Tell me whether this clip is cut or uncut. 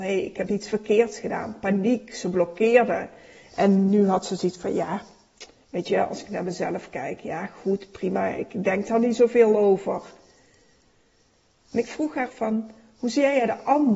cut